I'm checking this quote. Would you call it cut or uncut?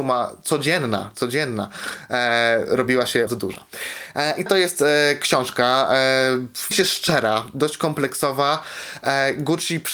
cut